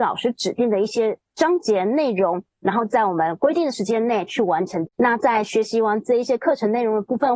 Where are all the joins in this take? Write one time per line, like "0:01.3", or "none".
0:01.3
0:04.9